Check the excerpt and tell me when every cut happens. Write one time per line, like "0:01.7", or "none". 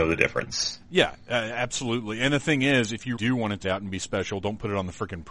0:03.2
0:03.6

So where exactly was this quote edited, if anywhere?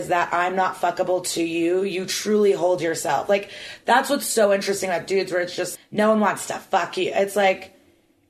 0:05.7

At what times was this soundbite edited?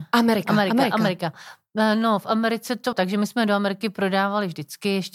0:02.9

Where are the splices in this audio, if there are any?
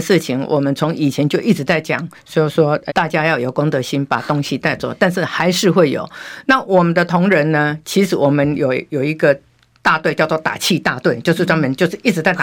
0:02.9

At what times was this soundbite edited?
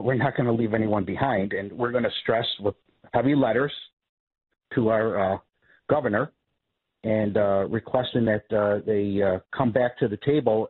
none

